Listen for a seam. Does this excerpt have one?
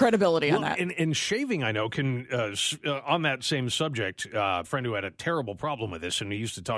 yes; 1 cut; at 4.6 s

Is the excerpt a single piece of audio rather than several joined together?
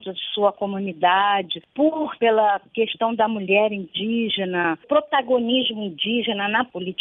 no; 2 cuts; at 2.2 s, 4.8 s

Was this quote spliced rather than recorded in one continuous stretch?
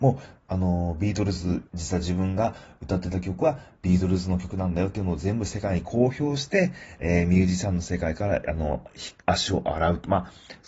yes; 2 cuts; at 1.7 s, 9.2 s

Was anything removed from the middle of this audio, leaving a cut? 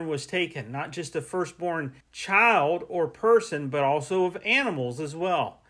yes; 1 cut; at 2.0 s

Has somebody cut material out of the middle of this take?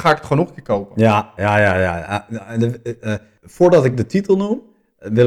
no; 0 cuts

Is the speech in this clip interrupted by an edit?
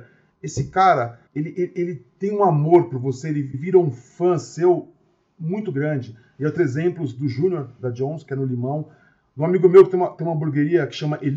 yes; 3 cuts; at 1.3 s, 3.5 s, 6.6 s

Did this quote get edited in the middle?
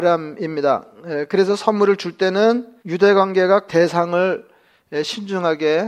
yes; 2 cuts; at 2.8 s, 3.7 s

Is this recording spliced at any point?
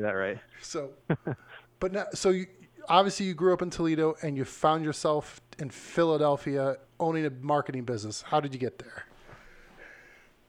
yes; 1 cut; at 6.9 s

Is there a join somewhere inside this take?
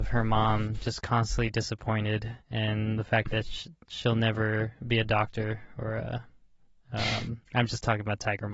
yes; 2 cuts; at 2.4 s, 7.4 s

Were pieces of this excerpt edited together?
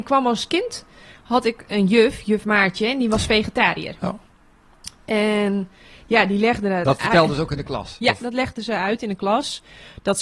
no; 0 cuts

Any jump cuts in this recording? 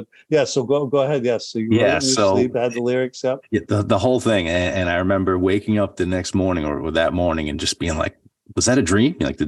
no; 0 cuts

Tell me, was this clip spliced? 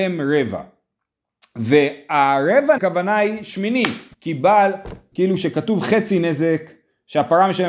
yes; 3 cuts; at 2.8 s, 4.1 s, 5.1 s

